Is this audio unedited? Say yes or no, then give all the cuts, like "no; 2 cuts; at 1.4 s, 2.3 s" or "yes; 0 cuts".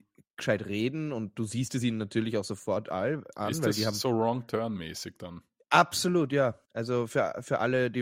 no; 1 cut; at 6.6 s